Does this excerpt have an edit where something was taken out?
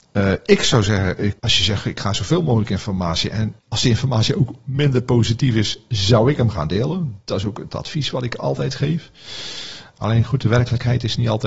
yes; 2 cuts; at 1.4 s, 3.6 s

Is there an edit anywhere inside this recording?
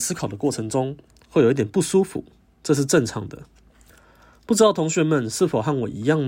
no; 0 cuts

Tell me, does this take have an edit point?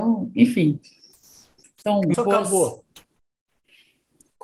yes; 1 cut; at 2.1 s

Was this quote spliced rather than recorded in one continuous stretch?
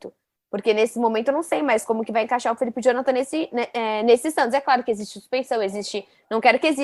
no; 0 cuts

